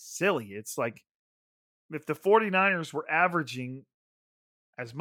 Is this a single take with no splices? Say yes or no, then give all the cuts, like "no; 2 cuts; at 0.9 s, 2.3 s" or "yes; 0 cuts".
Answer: yes; 0 cuts